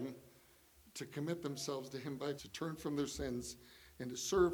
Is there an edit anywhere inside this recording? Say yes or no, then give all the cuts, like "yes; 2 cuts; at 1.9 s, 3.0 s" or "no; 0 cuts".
yes; 1 cut; at 2.4 s